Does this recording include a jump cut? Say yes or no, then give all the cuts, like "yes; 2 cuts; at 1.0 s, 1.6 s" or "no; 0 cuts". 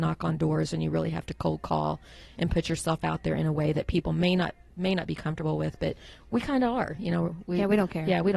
no; 0 cuts